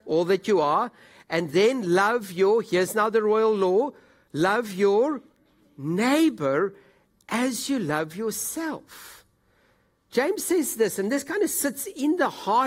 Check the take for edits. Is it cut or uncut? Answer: uncut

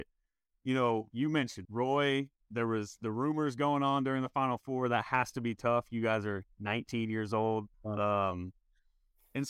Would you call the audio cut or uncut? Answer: cut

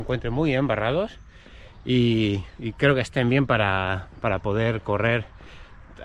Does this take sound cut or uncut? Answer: uncut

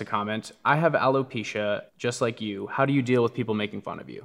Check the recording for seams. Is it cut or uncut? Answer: cut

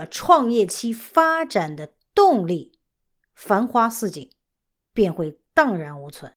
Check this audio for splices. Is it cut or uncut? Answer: uncut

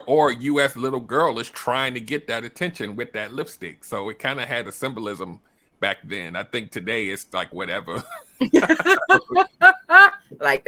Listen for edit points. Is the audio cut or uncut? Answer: uncut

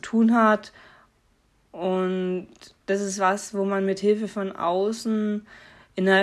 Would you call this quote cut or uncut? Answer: uncut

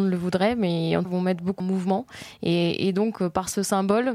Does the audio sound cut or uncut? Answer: cut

